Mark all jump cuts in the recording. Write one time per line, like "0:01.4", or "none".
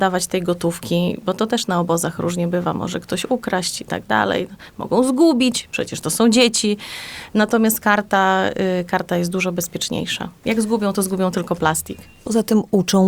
none